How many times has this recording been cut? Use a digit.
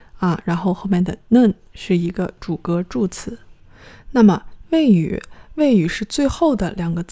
0